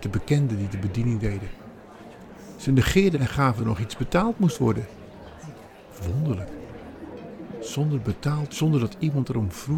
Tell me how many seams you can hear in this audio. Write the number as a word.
three